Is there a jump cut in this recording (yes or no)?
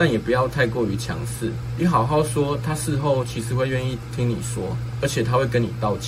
no